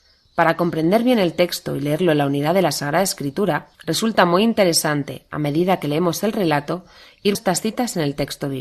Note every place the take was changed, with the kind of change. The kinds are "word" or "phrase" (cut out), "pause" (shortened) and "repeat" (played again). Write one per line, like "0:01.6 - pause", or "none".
0:03.7 - pause
0:07.3 - word